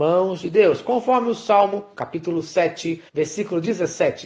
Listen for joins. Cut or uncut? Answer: cut